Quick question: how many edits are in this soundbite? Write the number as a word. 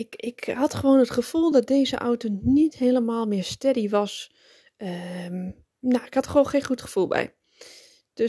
zero